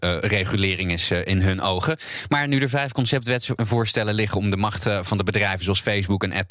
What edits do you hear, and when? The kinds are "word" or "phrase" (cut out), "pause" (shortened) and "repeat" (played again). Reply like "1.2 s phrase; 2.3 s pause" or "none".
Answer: none